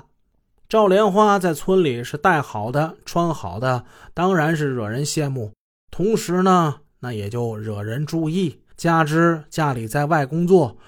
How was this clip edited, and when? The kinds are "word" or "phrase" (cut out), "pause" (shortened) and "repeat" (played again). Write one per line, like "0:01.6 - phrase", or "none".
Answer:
0:08.7 - pause